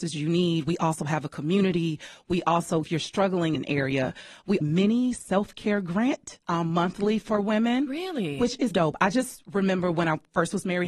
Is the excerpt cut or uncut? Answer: cut